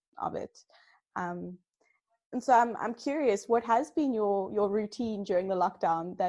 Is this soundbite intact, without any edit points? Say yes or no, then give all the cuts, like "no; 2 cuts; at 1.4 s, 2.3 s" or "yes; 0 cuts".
yes; 0 cuts